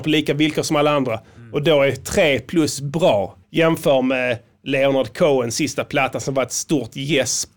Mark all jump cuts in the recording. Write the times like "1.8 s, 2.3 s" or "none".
3.4 s